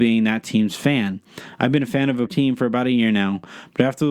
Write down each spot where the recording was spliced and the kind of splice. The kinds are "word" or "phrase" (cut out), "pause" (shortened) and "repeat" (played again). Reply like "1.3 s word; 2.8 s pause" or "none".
2.3 s word

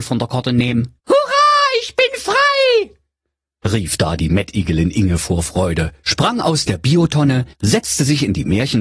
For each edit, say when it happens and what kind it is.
1.0 s pause; 7.5 s pause

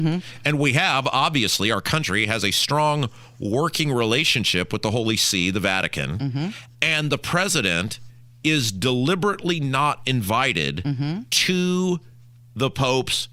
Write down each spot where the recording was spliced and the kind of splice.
none

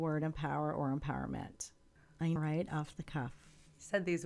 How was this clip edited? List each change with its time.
2.4 s word

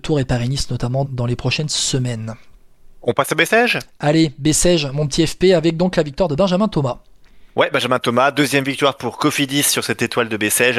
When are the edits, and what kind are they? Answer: 1.0 s word

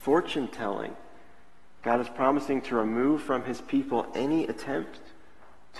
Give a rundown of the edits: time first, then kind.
none

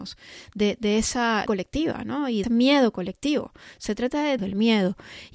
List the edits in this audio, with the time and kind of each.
1.5 s word; 2.4 s word; 4.4 s word

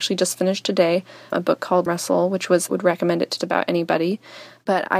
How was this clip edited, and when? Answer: 1.3 s word; 1.9 s phrase; 2.7 s phrase; 3.4 s word

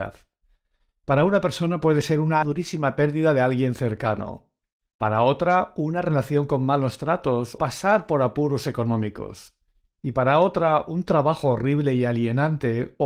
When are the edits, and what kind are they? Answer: 2.4 s phrase; 7.6 s word

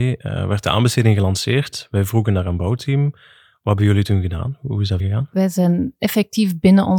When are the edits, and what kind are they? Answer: 5.0 s word

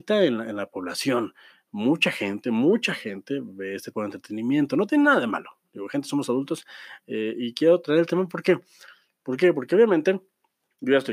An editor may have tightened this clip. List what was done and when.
3.9 s word

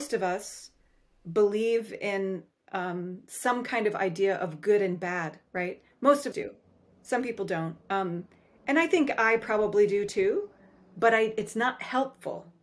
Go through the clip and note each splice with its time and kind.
5.5 s pause; 6.3 s word; 7.8 s pause

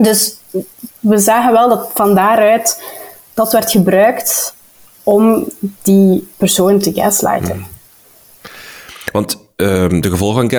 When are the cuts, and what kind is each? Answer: none

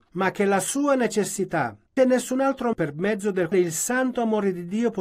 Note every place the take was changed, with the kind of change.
2.0 s phrase; 2.7 s word; 3.5 s word

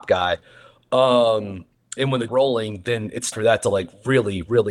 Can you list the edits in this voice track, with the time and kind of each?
2.0 s word; 2.3 s phrase; 3.3 s word

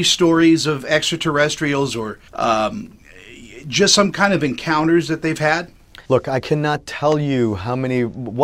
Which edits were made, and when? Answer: 2.3 s pause; 6.0 s pause

